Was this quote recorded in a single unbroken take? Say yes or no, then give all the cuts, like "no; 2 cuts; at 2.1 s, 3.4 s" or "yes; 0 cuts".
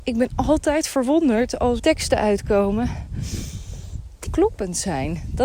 no; 2 cuts; at 1.8 s, 4.3 s